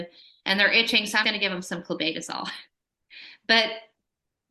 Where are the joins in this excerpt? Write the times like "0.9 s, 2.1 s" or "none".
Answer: 1.2 s